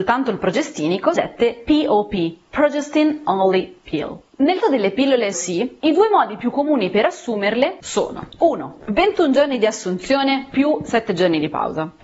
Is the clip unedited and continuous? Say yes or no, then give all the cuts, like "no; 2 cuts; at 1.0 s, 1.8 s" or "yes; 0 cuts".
no; 3 cuts; at 1.2 s, 4.6 s, 5.3 s